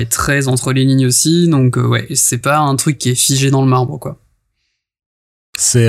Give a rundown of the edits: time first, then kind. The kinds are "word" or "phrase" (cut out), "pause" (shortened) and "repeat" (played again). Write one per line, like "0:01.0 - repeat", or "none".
none

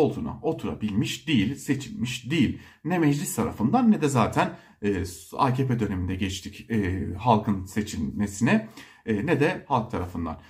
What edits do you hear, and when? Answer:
none

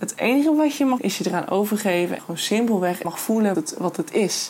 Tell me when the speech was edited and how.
0:01.0 - word
0:02.2 - word
0:03.0 - word
0:03.5 - word

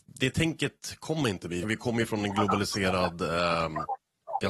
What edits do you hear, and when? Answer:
0:01.6 - phrase

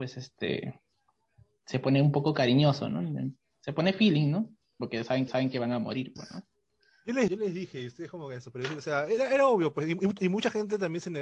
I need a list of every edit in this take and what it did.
0:05.3 - repeat
0:07.3 - word

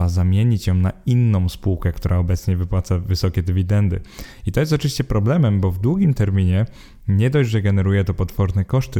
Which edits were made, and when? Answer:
none

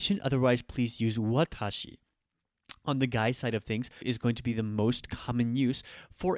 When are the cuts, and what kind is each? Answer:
0:04.0 - word

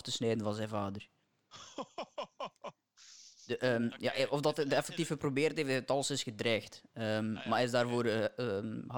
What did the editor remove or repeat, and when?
0:03.3 - pause

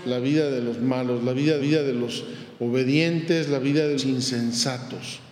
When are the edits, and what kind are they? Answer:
0:01.6 - repeat
0:04.0 - word

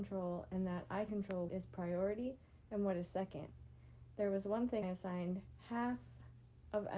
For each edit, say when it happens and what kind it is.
0:01.1 - word
0:01.5 - word
0:04.8 - word

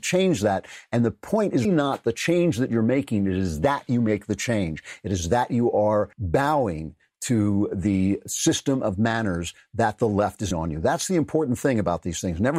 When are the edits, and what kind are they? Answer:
0:01.6 - word
0:06.1 - pause
0:10.5 - word

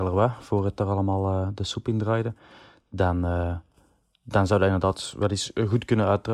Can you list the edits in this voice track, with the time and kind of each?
none

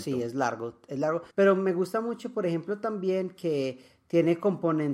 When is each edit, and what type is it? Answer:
0:01.3 - pause

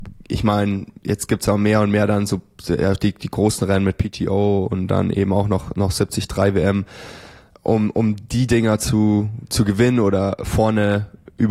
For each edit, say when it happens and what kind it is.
0:07.5 - word

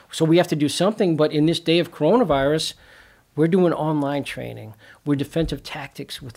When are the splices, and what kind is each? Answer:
0:05.2 - word

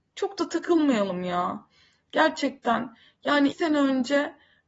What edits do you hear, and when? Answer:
0:03.5 - word

